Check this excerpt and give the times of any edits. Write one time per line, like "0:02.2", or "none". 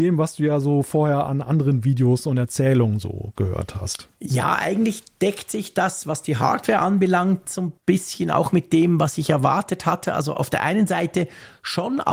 0:07.8

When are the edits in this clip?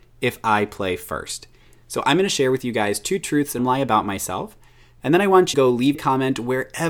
0:03.6
0:05.5
0:05.9

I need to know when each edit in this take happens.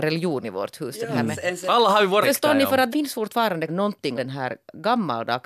0:02.2
0:02.9
0:03.7
0:04.2

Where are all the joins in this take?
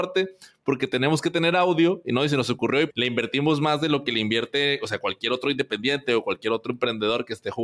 0:02.9

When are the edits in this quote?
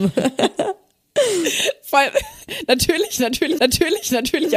0:03.6

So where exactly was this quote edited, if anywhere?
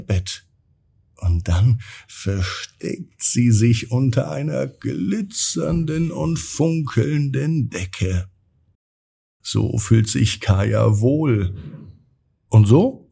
none

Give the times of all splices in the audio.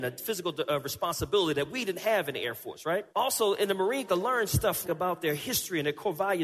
0:03.1
0:04.1
0:04.8

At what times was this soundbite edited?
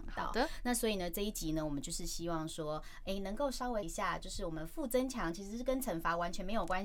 0:03.8

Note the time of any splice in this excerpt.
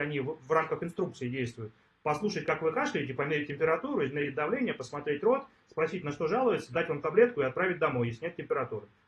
none

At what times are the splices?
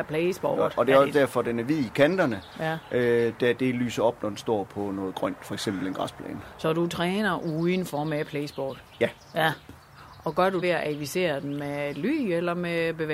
0:10.6

